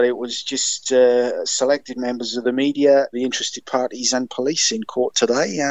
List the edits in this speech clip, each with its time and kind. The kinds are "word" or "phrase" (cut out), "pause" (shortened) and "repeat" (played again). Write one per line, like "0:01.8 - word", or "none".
0:03.1 - word

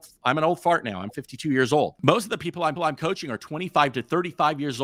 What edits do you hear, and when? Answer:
0:02.8 - repeat

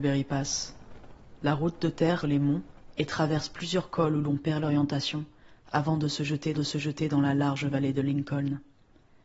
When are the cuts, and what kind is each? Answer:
0:02.2 - phrase
0:06.5 - repeat

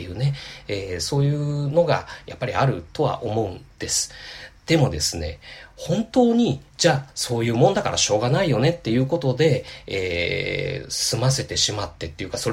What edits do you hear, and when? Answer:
0:06.7 - pause

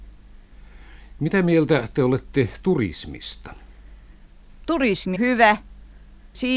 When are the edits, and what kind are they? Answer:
0:05.2 - word

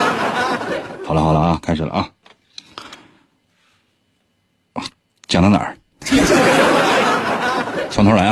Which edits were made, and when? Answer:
none

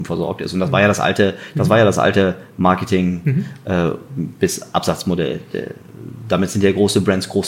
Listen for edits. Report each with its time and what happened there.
none

